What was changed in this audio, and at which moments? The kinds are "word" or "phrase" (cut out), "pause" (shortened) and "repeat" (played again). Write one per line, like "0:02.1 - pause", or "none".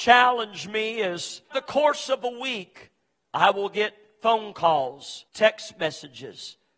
0:01.5 - word
0:05.3 - pause